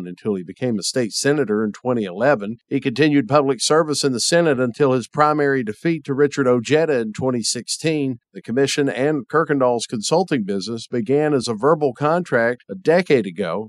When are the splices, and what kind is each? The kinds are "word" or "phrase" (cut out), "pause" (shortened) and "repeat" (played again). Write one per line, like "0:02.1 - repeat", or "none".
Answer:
none